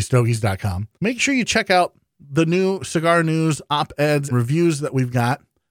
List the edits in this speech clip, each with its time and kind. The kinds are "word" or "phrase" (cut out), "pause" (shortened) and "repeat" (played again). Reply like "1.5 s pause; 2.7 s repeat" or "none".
0.9 s pause; 4.3 s word